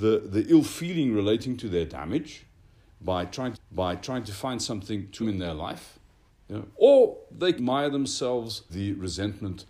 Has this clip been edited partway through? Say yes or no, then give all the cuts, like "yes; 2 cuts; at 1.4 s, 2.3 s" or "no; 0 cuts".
yes; 5 cuts; at 3.5 s, 5.2 s, 6.3 s, 7.6 s, 8.7 s